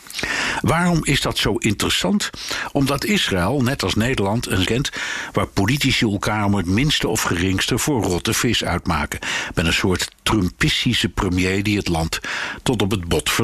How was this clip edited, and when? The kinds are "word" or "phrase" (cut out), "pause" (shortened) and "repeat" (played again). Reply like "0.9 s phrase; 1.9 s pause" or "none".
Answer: 4.6 s phrase